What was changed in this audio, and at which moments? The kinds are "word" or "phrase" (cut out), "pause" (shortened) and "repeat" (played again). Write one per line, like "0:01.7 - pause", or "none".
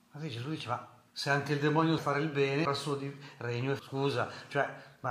0:01.1 - pause
0:02.0 - phrase
0:02.7 - word
0:03.8 - word